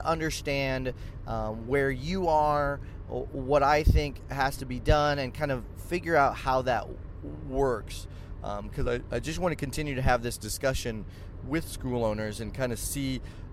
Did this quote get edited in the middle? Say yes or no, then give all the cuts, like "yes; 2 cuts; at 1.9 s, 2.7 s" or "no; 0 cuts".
no; 0 cuts